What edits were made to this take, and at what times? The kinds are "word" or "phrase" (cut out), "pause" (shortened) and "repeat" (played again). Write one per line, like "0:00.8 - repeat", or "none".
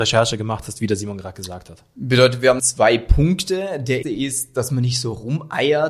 0:02.6 - word
0:04.0 - word